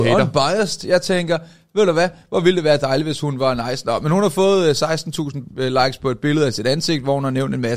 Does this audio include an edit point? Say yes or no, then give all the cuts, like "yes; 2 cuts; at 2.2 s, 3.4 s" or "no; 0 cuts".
no; 0 cuts